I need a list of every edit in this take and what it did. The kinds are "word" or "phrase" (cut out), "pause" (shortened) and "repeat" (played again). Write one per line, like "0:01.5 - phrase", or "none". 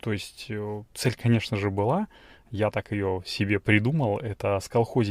none